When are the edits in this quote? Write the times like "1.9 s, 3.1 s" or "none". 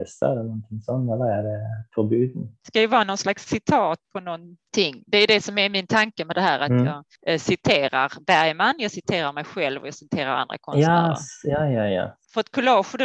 4.0 s